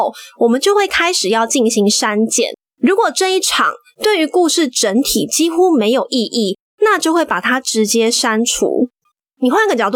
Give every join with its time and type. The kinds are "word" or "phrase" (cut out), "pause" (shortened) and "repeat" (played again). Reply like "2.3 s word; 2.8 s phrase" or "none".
none